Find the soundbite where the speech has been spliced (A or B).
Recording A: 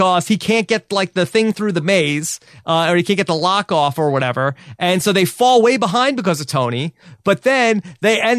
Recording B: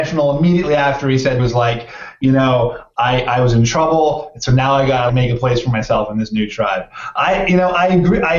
B